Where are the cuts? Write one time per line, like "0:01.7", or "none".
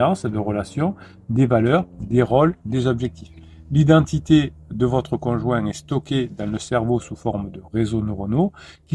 none